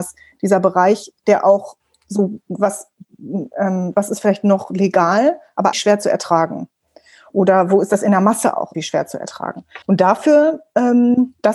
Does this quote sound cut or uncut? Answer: cut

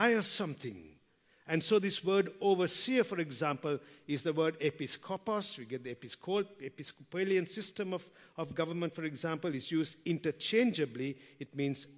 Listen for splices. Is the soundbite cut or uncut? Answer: uncut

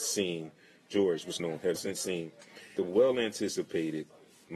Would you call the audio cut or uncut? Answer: cut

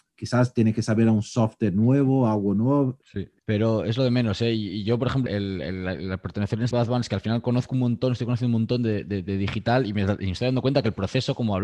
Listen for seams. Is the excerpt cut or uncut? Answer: cut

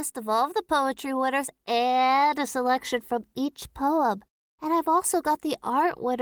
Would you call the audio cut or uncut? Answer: uncut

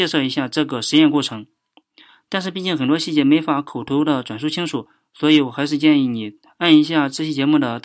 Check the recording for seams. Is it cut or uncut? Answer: uncut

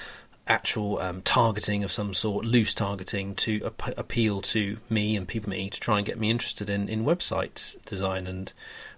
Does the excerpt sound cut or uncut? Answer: cut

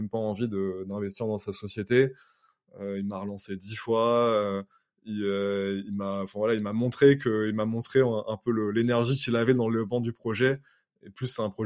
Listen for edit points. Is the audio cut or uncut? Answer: uncut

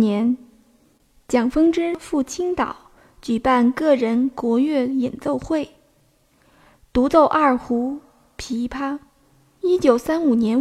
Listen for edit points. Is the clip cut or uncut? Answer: uncut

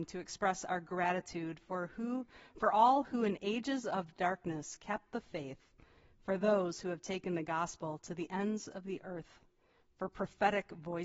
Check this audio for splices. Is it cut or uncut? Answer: uncut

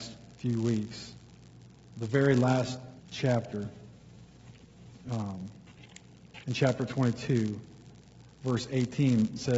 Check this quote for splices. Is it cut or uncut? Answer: cut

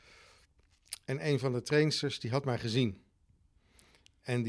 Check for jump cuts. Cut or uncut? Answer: uncut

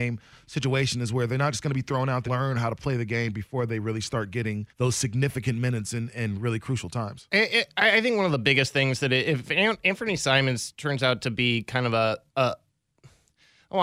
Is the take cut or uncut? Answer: cut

